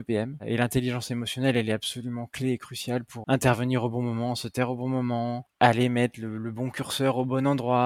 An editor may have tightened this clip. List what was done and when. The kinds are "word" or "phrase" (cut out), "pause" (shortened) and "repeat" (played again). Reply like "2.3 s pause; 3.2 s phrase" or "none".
3.2 s word